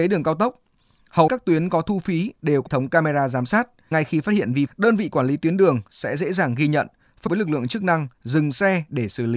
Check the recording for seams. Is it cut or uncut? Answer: cut